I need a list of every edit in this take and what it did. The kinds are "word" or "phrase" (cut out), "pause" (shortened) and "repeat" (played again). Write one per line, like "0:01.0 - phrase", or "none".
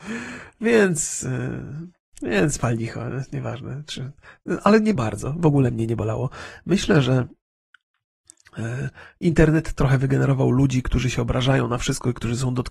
0:05.0 - phrase